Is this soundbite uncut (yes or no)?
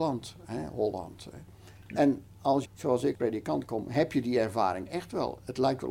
no